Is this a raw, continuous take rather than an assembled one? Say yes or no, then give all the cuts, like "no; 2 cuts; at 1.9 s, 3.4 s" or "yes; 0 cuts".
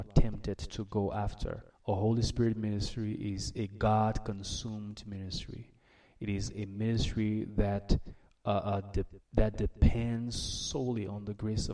no; 2 cuts; at 1.7 s, 9.2 s